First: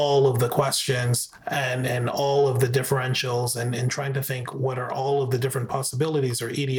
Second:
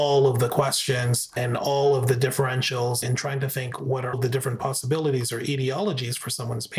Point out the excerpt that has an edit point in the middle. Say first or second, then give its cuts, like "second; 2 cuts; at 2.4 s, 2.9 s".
second; 3 cuts; at 1.4 s, 3.0 s, 4.1 s